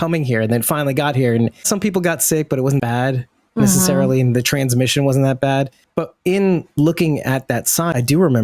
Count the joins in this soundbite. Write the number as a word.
one